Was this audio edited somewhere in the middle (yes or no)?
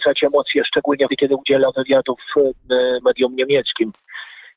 yes